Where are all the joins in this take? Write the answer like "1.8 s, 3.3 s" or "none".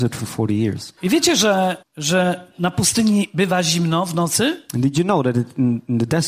1.0 s, 1.8 s